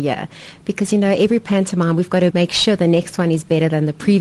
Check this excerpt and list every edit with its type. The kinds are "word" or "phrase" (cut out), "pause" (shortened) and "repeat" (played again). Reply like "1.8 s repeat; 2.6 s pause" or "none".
2.3 s word